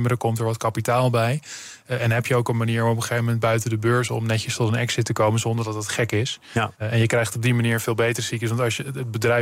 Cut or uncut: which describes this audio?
cut